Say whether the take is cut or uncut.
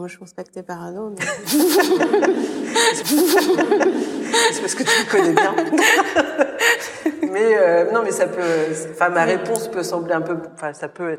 cut